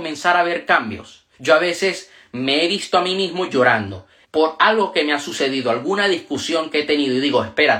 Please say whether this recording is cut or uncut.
cut